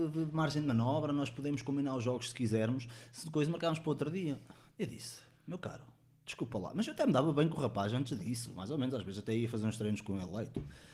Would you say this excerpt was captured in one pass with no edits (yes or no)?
yes